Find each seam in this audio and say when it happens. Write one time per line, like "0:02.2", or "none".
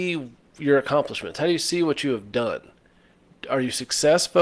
none